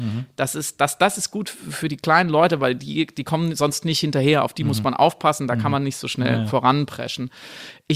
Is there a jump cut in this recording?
no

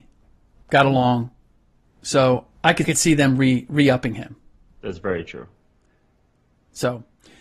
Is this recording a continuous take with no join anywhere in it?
no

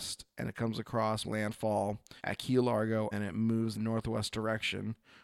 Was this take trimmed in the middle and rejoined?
yes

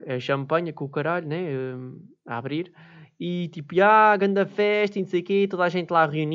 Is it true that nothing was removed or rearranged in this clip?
yes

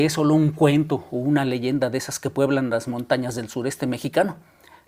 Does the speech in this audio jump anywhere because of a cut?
no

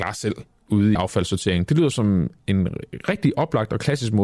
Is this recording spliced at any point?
yes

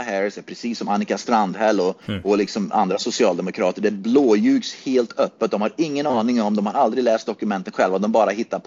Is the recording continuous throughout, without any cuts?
no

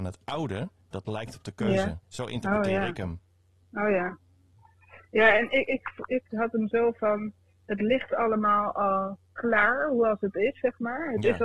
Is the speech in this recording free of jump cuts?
no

